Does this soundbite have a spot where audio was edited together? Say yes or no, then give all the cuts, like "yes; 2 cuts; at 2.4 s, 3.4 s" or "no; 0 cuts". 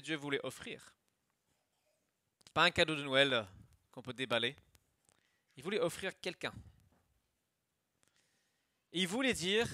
yes; 1 cut; at 2.5 s